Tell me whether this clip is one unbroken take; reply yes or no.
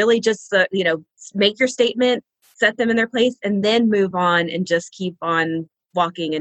yes